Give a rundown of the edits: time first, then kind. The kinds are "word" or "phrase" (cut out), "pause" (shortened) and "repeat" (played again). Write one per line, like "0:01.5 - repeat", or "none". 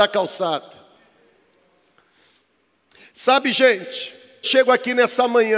0:04.4 - word